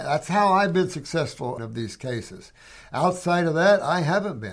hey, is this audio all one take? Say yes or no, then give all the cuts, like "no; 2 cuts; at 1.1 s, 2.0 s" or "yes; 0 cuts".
no; 1 cut; at 1.6 s